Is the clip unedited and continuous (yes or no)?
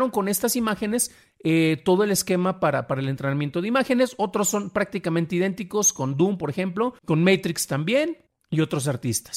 no